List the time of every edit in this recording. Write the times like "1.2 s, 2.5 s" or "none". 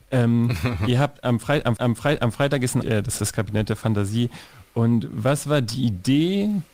1.8 s, 2.8 s, 3.2 s